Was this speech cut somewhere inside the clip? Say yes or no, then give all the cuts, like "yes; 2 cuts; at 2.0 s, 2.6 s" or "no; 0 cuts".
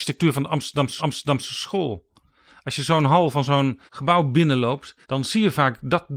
yes; 3 cuts; at 1.0 s, 3.9 s, 5.0 s